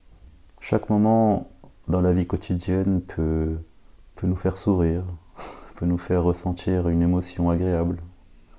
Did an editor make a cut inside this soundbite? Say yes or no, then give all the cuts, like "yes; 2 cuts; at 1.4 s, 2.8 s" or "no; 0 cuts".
no; 0 cuts